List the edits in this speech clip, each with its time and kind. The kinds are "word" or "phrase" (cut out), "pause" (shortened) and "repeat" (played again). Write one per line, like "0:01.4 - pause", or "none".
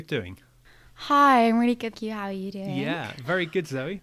0:01.9 - word